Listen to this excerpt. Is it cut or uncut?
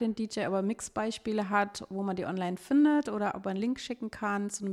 uncut